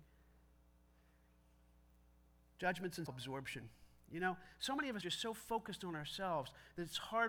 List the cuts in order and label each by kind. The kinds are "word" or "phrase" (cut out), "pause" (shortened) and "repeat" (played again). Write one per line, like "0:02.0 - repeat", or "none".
0:03.1 - word
0:05.0 - word